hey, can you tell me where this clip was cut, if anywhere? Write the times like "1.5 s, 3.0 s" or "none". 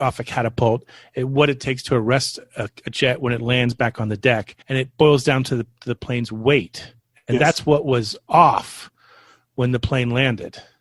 4.6 s